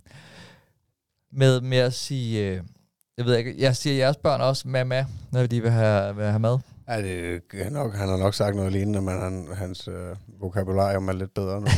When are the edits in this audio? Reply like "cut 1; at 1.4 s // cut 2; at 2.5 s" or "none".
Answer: none